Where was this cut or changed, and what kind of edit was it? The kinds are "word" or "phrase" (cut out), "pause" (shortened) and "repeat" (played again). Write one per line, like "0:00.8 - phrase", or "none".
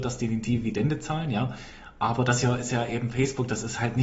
none